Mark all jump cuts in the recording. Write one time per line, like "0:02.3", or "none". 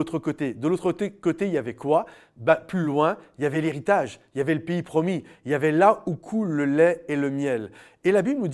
none